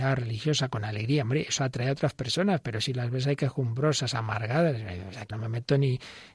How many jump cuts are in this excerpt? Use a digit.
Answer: 1